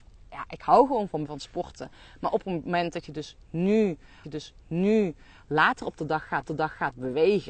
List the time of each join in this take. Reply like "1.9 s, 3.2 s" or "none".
1.2 s, 4.2 s, 6.4 s

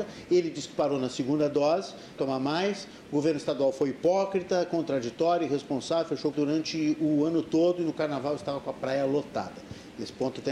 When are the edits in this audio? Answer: 2.2 s, 6.3 s

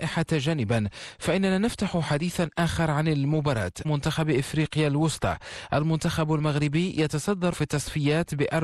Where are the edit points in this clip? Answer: 3.8 s, 7.5 s

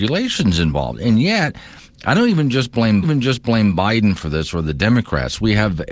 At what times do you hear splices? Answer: 3.0 s

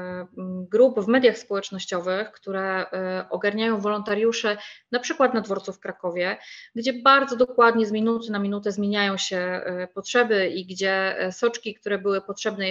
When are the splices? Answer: none

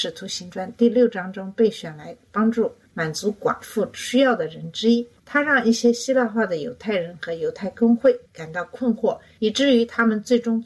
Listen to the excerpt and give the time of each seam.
8.3 s

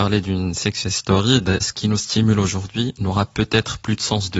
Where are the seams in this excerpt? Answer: 1.6 s

